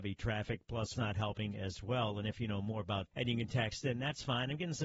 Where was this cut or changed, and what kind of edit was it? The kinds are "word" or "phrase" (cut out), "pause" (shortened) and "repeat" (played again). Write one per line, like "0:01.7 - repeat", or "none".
0:00.9 - phrase
0:03.1 - word